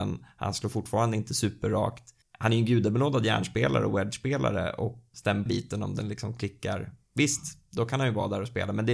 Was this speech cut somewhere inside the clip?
yes; 3 cuts; at 2.2 s, 5.1 s, 5.5 s

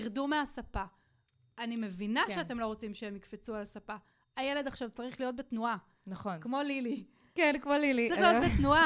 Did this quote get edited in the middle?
no; 0 cuts

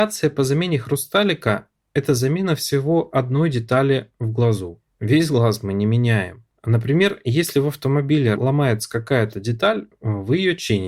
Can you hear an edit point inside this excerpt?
no; 0 cuts

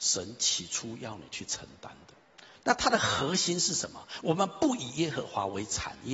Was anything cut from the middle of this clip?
yes; 1 cut; at 2.4 s

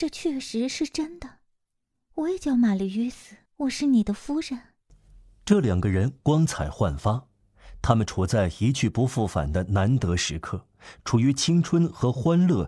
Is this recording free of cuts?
no; 2 cuts; at 3.5 s, 4.8 s

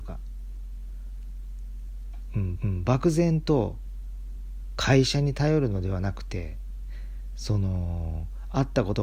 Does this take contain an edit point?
yes; 1 cut; at 2.6 s

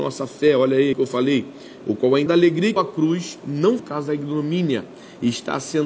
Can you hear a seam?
yes; 5 cuts; at 0.9 s, 1.8 s, 2.3 s, 2.8 s, 3.8 s

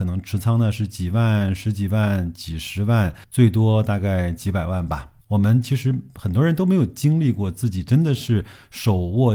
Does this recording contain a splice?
yes; 2 cuts; at 3.2 s, 5.2 s

